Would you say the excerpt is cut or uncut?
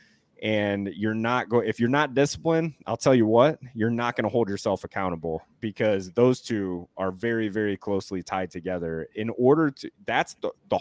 uncut